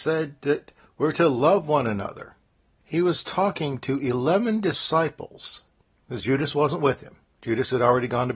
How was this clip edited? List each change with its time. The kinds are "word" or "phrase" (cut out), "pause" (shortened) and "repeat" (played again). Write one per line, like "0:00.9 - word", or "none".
none